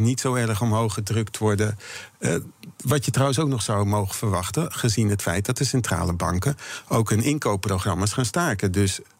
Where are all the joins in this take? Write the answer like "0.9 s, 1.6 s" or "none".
none